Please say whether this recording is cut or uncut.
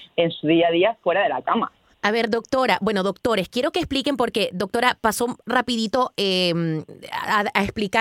uncut